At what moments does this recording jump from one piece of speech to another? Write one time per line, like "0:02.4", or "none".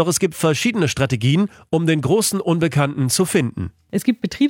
none